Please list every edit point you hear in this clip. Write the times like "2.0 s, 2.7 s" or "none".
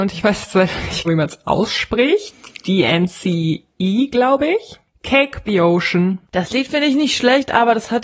1.0 s, 3.7 s, 5.5 s, 6.2 s